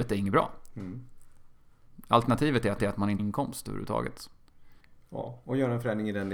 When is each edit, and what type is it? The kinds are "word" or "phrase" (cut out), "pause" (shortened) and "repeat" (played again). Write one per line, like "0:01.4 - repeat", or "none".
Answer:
0:02.8 - repeat
0:03.2 - phrase
0:04.8 - pause